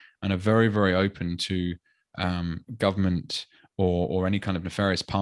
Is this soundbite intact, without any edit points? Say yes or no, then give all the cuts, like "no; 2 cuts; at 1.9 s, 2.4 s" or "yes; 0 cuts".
yes; 0 cuts